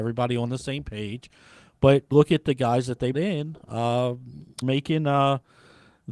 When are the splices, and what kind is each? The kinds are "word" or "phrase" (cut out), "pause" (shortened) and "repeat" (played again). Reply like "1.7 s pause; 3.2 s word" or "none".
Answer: 2.1 s word; 3.1 s word; 4.6 s word

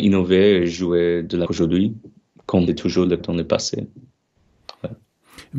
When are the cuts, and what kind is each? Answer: 1.5 s word; 2.7 s word; 3.2 s word

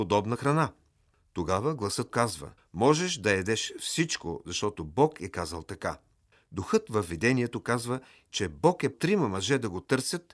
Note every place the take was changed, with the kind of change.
2.1 s word; 2.6 s pause; 8.3 s word; 8.9 s word

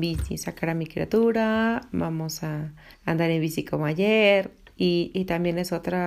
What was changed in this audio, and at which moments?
2.9 s pause

